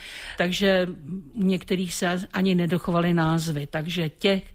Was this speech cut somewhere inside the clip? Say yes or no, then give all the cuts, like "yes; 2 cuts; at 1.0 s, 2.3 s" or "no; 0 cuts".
no; 0 cuts